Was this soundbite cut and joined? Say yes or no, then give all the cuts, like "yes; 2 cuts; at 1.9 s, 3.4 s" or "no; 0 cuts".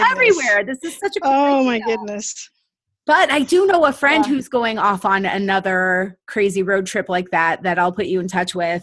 no; 0 cuts